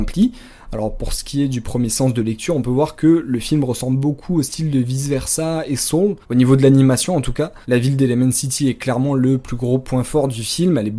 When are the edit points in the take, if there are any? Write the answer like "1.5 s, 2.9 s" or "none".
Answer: 6.2 s, 7.6 s